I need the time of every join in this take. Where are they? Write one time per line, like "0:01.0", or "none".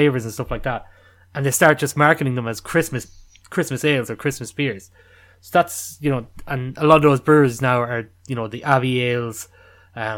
none

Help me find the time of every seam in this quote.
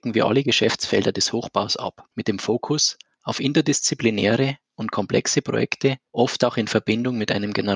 0:02.1
0:06.1

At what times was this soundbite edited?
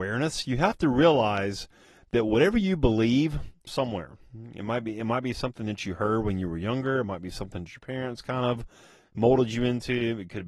0:03.7

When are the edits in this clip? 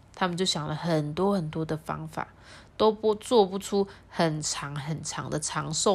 none

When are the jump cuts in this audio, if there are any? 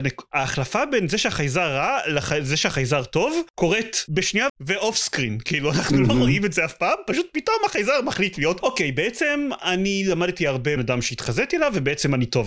0:04.5
0:10.8

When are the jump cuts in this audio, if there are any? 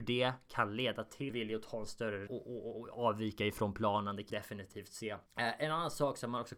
0:01.3
0:02.3
0:04.3
0:05.3

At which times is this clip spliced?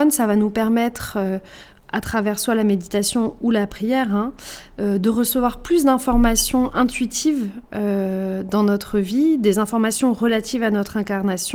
none

